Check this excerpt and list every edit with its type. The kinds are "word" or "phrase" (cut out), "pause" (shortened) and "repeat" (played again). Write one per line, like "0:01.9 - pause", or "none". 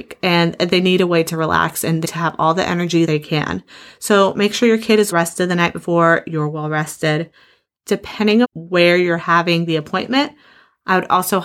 0:02.0 - word
0:03.1 - word
0:05.1 - word
0:08.4 - word

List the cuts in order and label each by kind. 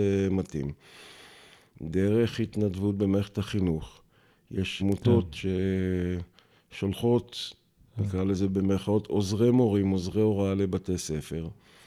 0:04.8 - word

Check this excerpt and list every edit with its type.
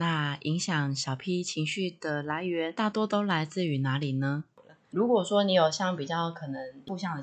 none

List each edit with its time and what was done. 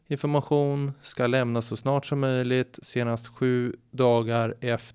none

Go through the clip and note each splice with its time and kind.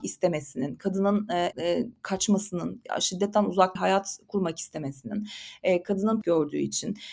0:01.5 - word
0:03.8 - word
0:06.2 - phrase

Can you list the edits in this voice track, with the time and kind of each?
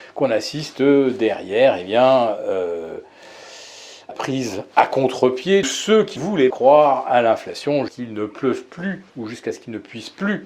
0:04.1 - word
0:05.6 - word
0:06.2 - word
0:06.5 - word
0:07.9 - phrase
0:09.1 - pause

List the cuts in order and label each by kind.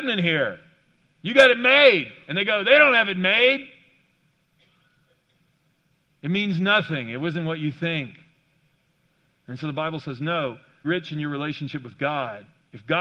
0:10.8 - word

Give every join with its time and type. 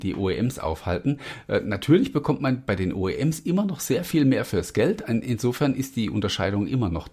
none

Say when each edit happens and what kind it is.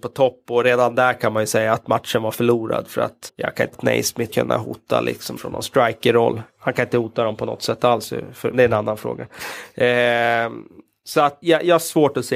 0:03.3 - word
0:03.7 - word
0:04.3 - word
0:05.4 - word
0:08.5 - word
0:11.4 - word

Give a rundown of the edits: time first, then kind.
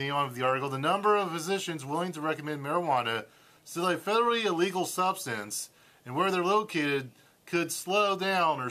none

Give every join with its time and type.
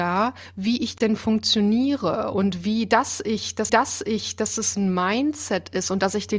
0:03.7 - repeat

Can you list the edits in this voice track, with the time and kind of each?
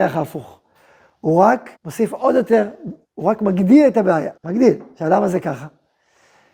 0:01.8 - pause
0:03.0 - pause
0:04.4 - pause

